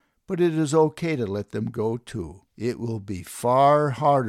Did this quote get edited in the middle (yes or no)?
yes